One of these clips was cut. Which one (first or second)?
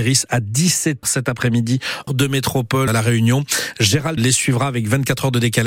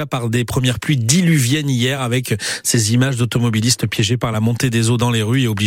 first